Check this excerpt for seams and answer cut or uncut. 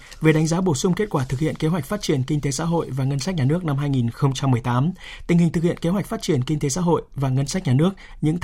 uncut